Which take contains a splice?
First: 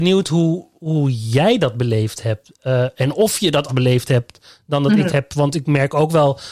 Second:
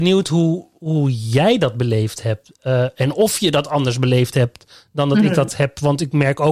first; 2 cuts; at 3.7 s, 5.1 s

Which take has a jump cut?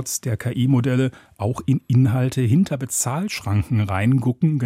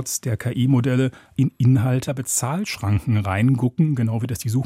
second; 2 cuts; at 1.4 s, 2.0 s

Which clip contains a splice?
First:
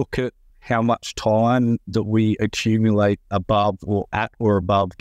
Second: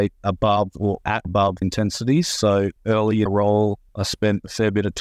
second; 5 cuts; at 1.2 s, 1.6 s, 2.8 s, 3.3 s, 3.9 s

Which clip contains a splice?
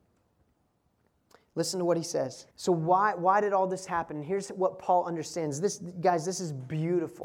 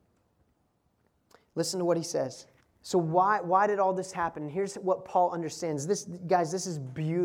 first; 1 cut; at 2.5 s

